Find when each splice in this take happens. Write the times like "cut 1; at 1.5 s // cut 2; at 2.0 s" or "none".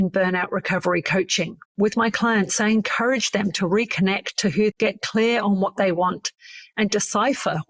cut 1; at 1.6 s // cut 2; at 4.7 s